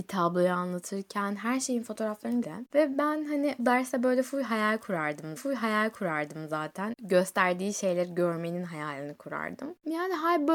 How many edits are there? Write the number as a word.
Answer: three